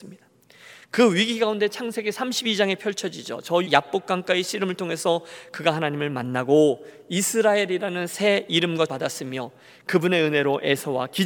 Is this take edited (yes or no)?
yes